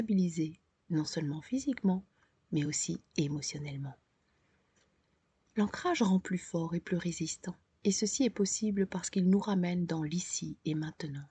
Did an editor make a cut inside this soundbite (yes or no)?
no